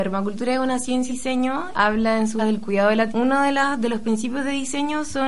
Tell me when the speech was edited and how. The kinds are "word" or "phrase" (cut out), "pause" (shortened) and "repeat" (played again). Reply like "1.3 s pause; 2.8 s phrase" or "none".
1.1 s word; 1.7 s word; 2.4 s word; 3.1 s word